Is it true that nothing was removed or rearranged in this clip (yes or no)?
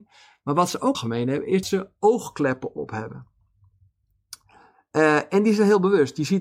no